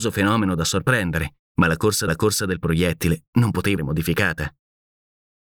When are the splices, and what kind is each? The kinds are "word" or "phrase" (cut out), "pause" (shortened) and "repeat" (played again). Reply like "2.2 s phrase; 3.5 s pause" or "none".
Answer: 1.5 s pause; 2.1 s repeat; 3.8 s word